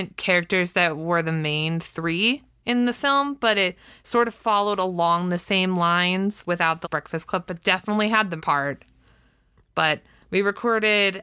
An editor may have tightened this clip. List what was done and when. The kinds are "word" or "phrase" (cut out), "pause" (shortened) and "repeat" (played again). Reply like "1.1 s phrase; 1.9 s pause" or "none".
6.8 s word; 7.5 s word; 8.4 s word